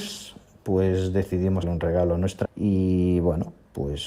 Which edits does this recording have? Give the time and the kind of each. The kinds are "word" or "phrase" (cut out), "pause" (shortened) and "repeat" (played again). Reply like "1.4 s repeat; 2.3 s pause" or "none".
1.6 s word; 2.4 s word